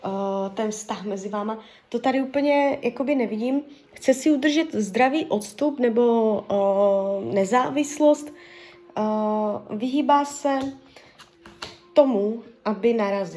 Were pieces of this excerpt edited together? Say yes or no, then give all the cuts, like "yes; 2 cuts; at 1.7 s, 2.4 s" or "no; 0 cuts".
no; 0 cuts